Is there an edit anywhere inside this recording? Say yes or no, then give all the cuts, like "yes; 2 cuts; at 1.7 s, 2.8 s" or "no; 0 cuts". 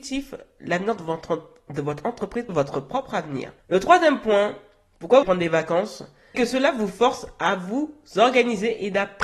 yes; 4 cuts; at 2.5 s, 3.6 s, 5.2 s, 6.3 s